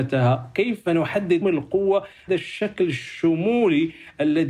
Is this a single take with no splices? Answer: no; 2 cuts; at 1.4 s, 2.3 s

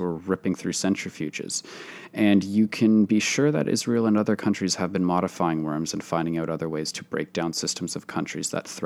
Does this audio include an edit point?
no; 0 cuts

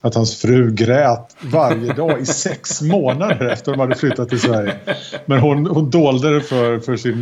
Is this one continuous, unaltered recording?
yes; 0 cuts

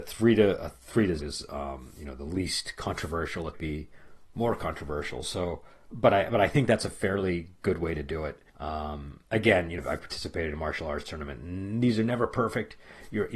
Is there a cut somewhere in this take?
yes; 5 cuts; at 1.2 s, 3.5 s, 5.9 s, 8.5 s, 9.8 s

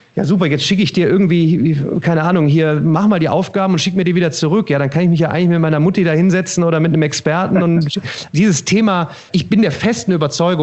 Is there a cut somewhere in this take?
yes; 2 cuts; at 8.3 s, 9.3 s

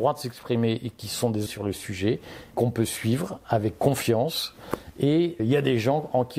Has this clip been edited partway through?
yes; 3 cuts; at 1.5 s, 2.5 s, 5.4 s

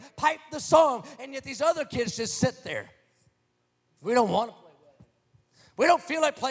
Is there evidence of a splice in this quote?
no; 0 cuts

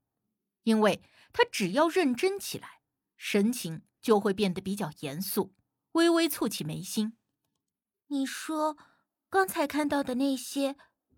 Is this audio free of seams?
yes; 0 cuts

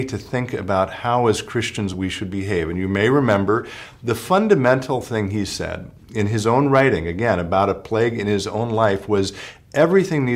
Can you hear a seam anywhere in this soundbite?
no; 0 cuts

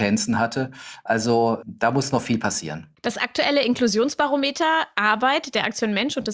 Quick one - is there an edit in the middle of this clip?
yes; 2 cuts; at 1.6 s, 3.0 s

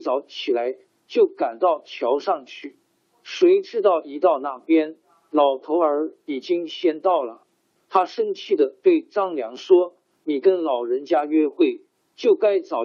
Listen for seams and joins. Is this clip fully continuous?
yes; 0 cuts

